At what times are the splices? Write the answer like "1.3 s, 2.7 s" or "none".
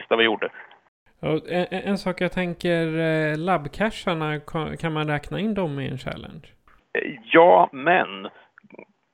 7.2 s